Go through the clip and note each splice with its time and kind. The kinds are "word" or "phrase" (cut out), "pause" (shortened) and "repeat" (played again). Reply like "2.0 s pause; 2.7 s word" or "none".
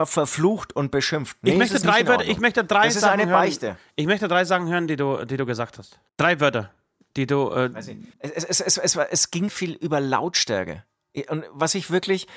6.1 s pause; 8.1 s pause; 9.5 s word